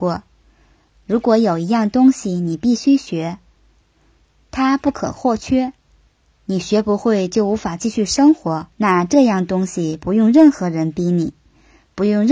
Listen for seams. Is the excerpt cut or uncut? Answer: cut